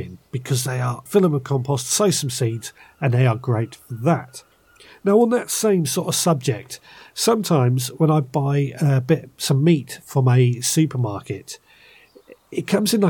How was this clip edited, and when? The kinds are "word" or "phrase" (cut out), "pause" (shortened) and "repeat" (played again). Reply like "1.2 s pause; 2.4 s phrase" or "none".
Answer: 1.1 s word